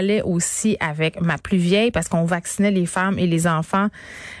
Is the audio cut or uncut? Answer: uncut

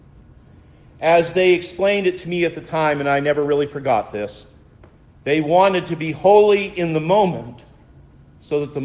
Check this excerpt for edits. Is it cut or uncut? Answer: uncut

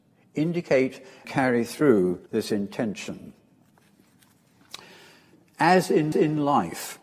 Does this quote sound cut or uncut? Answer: cut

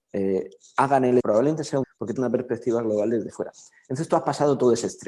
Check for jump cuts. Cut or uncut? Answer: cut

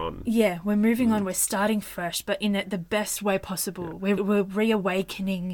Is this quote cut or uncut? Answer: cut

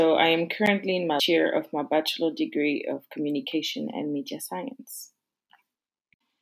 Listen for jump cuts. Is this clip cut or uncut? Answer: cut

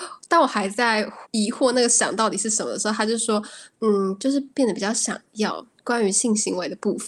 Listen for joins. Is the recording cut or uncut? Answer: cut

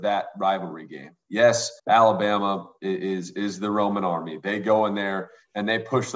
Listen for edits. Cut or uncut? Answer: cut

